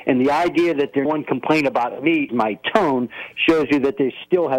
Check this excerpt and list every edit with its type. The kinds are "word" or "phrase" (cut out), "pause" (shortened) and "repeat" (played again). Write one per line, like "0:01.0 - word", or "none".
0:01.0 - word
0:02.3 - word